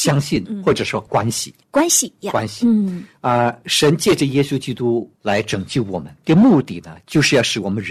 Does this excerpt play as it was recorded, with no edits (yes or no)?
no